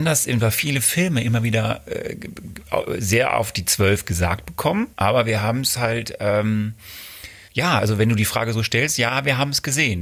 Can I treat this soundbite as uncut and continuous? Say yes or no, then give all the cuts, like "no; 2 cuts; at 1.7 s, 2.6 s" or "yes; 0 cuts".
no; 2 cuts; at 4.9 s, 7.5 s